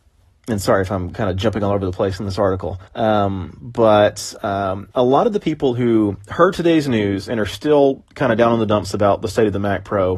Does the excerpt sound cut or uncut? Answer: cut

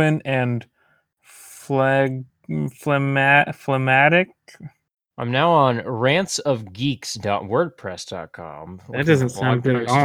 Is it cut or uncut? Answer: uncut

